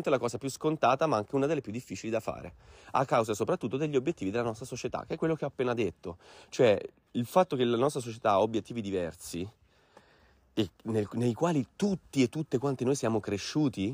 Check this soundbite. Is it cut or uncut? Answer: uncut